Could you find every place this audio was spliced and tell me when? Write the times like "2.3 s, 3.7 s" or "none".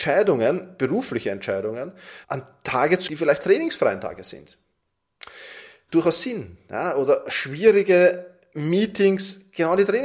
2.2 s, 3.1 s, 3.4 s, 5.9 s